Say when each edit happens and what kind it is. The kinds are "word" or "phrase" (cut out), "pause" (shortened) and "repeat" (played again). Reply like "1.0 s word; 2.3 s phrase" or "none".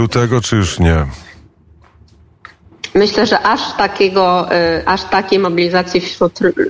none